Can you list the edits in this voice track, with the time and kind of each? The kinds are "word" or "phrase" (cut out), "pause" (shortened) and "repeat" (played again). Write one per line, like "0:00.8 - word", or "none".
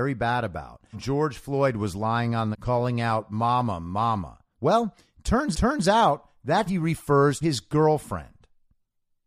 0:00.9 - word
0:02.5 - phrase
0:04.5 - pause
0:05.5 - repeat
0:06.7 - word
0:07.4 - word